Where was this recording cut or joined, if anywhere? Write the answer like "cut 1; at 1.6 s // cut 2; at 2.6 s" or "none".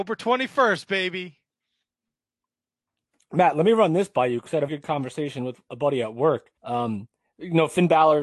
cut 1; at 4.7 s // cut 2; at 5.7 s // cut 3; at 6.6 s